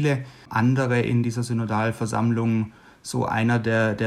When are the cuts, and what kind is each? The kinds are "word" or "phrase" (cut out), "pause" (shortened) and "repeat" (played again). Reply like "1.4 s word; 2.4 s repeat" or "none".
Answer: none